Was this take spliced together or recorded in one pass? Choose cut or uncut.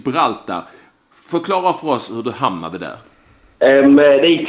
uncut